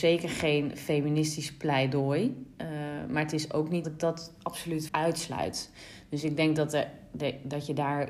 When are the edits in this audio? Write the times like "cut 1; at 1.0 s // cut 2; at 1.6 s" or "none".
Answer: cut 1; at 3.8 s // cut 2; at 4.9 s